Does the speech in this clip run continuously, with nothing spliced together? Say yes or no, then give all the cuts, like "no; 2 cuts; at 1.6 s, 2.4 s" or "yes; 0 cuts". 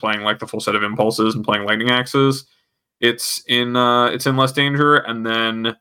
yes; 0 cuts